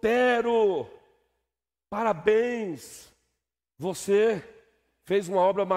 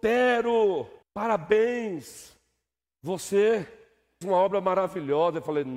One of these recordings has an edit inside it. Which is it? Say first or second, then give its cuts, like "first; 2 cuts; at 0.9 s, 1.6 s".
second; 2 cuts; at 1.0 s, 4.2 s